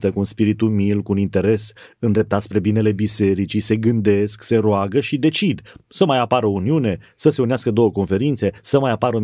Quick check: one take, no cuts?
yes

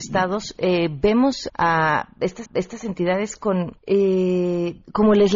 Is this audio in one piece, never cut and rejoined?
no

